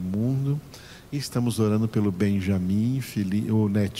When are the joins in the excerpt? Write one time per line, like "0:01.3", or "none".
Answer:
none